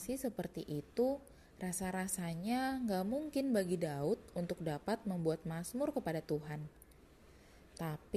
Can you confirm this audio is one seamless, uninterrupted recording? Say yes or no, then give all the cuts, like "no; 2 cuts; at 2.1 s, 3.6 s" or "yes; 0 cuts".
yes; 0 cuts